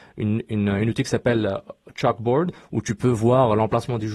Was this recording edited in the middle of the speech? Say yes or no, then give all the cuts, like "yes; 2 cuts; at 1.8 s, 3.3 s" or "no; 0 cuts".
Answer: no; 0 cuts